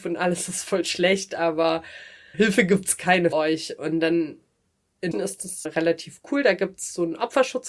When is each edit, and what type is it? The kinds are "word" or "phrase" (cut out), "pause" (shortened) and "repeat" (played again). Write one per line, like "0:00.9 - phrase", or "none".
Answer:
0:02.3 - word
0:03.3 - word
0:05.1 - word
0:05.6 - word